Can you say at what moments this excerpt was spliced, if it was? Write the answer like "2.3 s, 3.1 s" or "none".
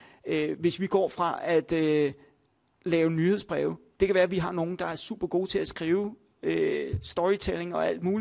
none